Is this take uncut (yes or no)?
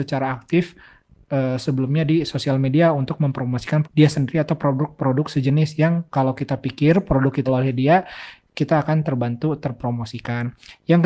no